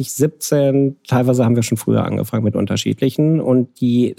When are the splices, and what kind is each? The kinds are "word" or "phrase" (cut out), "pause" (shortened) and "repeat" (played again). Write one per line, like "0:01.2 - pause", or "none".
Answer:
none

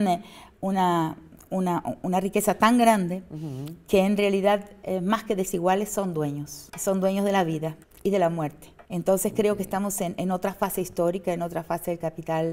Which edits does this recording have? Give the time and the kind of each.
0:07.8 - pause
0:08.9 - pause

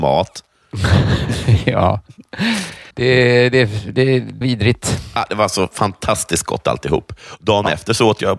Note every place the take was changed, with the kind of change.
0:02.9 - pause
0:04.4 - word

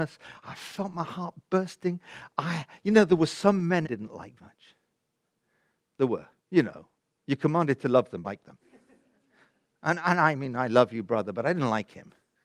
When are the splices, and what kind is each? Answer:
0:03.8 - phrase
0:04.4 - word
0:06.4 - pause
0:06.9 - pause
0:08.2 - phrase
0:08.6 - pause

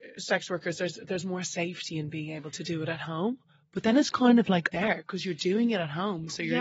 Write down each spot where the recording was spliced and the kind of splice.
0:04.7 - word

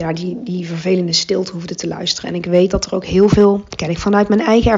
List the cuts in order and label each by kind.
none

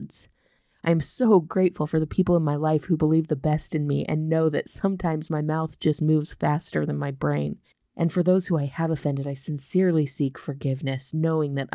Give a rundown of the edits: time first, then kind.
none

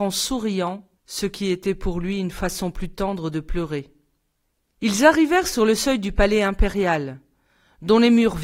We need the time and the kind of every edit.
0:01.0 - pause
0:04.4 - pause

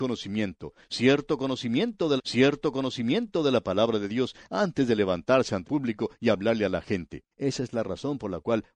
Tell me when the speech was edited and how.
0:02.2 - repeat
0:05.6 - word
0:07.3 - pause

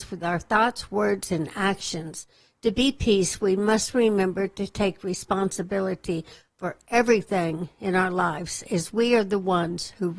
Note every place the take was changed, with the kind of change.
none

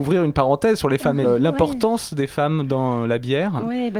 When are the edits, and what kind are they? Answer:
0:01.2 - phrase

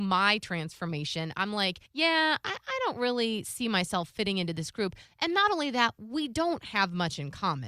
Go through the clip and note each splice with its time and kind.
0:01.9 - pause

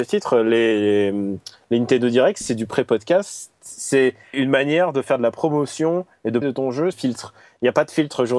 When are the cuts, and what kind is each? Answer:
0:04.3 - word
0:06.4 - word
0:06.9 - phrase

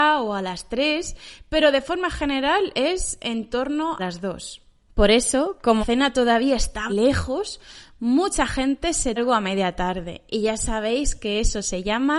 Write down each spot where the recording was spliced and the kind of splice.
0:04.0 - word
0:05.8 - word
0:06.9 - word
0:09.2 - word

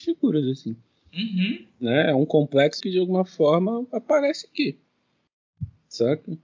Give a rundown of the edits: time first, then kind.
0:02.8 - word

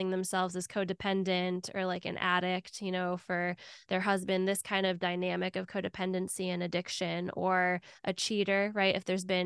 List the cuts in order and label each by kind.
none

